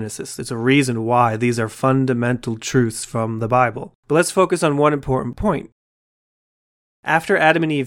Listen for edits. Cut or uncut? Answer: cut